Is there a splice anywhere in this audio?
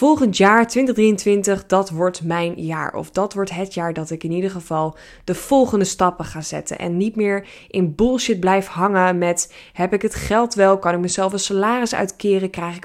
no; 0 cuts

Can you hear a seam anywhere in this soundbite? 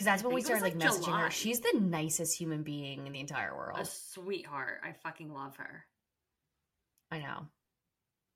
no; 0 cuts

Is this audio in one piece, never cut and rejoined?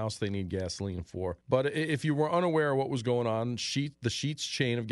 no; 1 cut; at 1.4 s

